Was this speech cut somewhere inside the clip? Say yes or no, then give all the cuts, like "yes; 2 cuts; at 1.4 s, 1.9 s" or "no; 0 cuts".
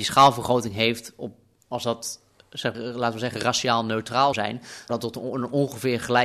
yes; 3 cuts; at 2.7 s, 4.3 s, 4.9 s